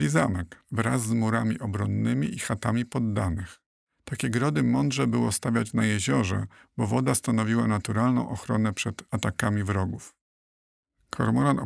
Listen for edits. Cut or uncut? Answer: uncut